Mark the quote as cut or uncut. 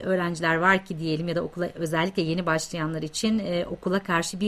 uncut